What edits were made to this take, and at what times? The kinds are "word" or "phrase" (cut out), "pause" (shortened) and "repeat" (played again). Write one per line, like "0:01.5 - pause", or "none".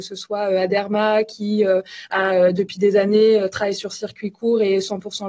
none